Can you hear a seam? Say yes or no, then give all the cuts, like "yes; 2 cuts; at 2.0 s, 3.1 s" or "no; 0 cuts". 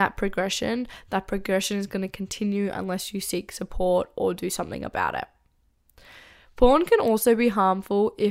no; 0 cuts